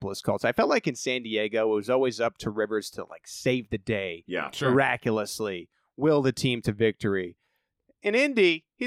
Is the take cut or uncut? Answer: uncut